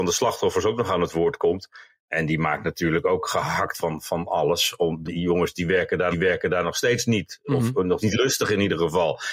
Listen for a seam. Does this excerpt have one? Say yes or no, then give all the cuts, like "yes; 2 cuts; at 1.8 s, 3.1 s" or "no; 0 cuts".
yes; 4 cuts; at 3.7 s, 5.0 s, 6.1 s, 8.0 s